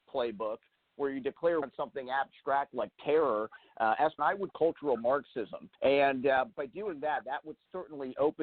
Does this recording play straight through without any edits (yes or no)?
no